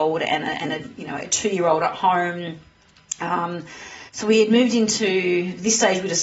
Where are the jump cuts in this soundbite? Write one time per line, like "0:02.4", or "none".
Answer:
0:04.1